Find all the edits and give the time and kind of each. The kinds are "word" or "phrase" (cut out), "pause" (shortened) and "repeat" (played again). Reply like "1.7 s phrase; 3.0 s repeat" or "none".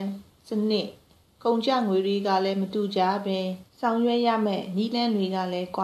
3.7 s pause